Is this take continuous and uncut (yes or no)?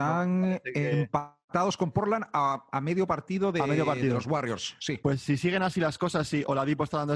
yes